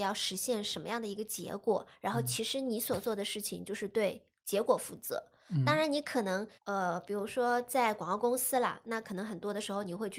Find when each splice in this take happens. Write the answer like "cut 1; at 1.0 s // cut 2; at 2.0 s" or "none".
cut 1; at 6.6 s

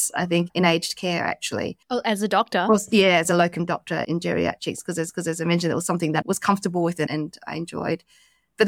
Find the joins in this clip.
cut 1; at 1.8 s // cut 2; at 3.2 s // cut 3; at 5.1 s // cut 4; at 6.2 s

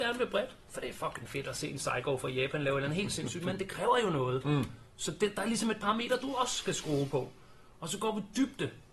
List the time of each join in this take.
none

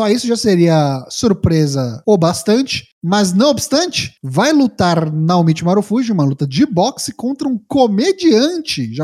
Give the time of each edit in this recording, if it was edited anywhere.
none

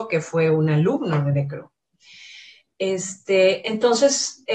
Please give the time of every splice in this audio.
none

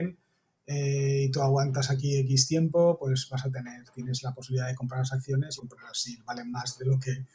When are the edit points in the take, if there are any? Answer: cut 1; at 5.6 s

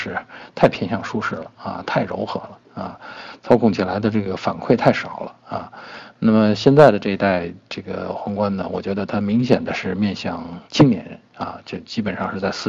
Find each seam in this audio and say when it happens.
cut 1; at 10.7 s

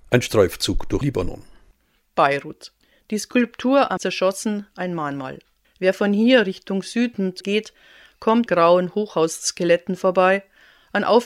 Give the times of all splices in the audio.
cut 1; at 1.0 s // cut 2; at 2.8 s // cut 3; at 4.0 s // cut 4; at 5.6 s // cut 5; at 7.4 s // cut 6; at 8.5 s

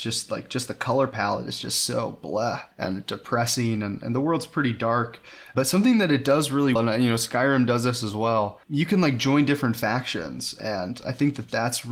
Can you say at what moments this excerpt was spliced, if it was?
cut 1; at 2.7 s // cut 2; at 6.8 s // cut 3; at 8.6 s

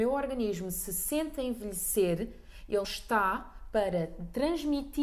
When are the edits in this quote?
cut 1; at 2.8 s // cut 2; at 3.7 s

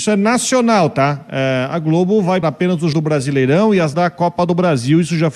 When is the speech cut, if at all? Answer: cut 1; at 2.4 s // cut 2; at 2.9 s // cut 3; at 3.9 s

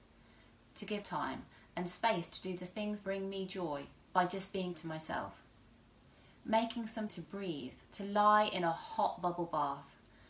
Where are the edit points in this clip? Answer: cut 1; at 1.0 s // cut 2; at 3.0 s // cut 3; at 4.0 s // cut 4; at 4.7 s // cut 5; at 7.1 s // cut 6; at 7.8 s

